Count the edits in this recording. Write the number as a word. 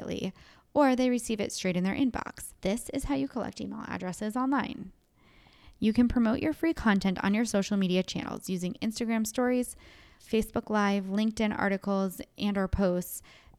two